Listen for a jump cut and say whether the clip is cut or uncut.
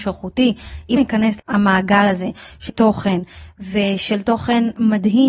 cut